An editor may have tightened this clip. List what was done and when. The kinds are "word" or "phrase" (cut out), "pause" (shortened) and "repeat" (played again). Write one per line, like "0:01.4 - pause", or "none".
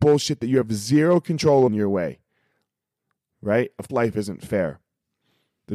0:01.7 - phrase
0:03.9 - word